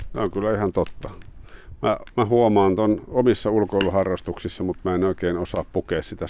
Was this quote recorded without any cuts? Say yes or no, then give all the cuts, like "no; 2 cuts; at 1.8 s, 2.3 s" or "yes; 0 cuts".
yes; 0 cuts